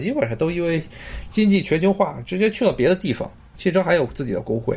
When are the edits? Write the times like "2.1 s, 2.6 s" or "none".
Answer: 3.5 s

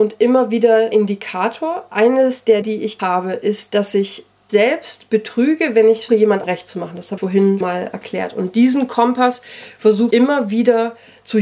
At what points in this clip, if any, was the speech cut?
0.9 s, 2.6 s, 3.0 s, 4.5 s, 6.1 s, 6.4 s, 7.2 s, 7.6 s, 10.1 s

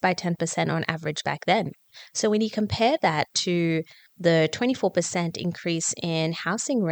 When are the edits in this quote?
none

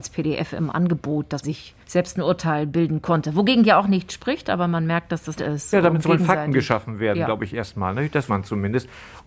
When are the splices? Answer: 1.4 s, 1.8 s, 5.4 s, 8.3 s

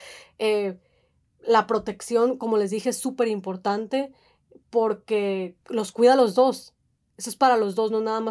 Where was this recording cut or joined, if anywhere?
none

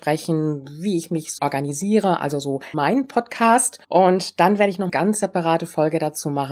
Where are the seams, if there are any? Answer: 1.4 s, 2.7 s, 3.8 s, 4.9 s

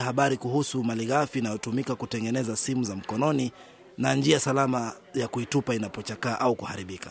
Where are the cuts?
none

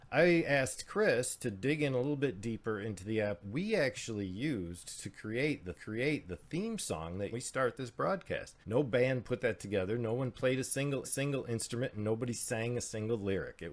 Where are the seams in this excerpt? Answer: 3.4 s, 5.7 s, 7.3 s, 8.6 s, 11.0 s

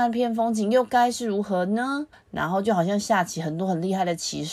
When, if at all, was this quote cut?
2.1 s

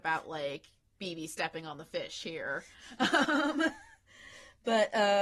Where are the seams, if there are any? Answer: 1.0 s

